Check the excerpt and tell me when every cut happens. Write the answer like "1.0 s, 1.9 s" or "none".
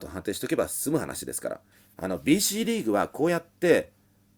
1.7 s